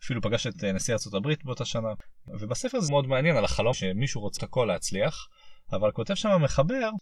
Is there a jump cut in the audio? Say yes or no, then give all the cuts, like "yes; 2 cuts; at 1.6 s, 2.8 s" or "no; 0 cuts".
yes; 3 cuts; at 2.9 s, 3.7 s, 4.4 s